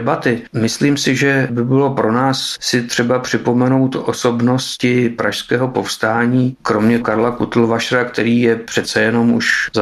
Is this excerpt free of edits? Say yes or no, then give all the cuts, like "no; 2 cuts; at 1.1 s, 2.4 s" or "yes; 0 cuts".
no; 2 cuts; at 2.6 s, 7.0 s